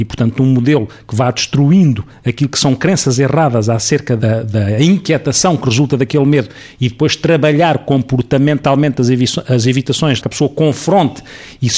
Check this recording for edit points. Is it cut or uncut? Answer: cut